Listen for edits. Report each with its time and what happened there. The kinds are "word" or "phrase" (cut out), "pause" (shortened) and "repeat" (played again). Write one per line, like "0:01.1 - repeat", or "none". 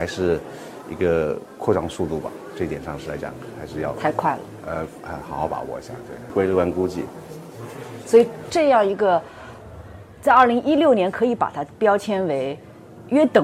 none